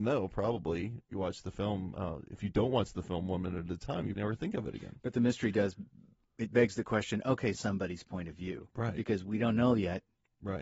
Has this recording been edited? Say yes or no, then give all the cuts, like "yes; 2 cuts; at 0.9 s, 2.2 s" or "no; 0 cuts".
yes; 3 cuts; at 1.1 s, 4.2 s, 7.5 s